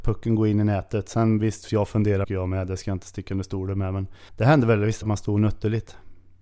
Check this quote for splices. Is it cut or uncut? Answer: cut